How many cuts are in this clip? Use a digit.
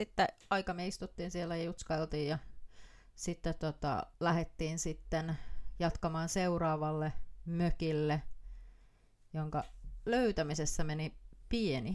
1